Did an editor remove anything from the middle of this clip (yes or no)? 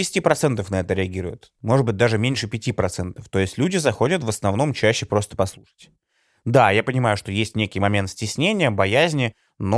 no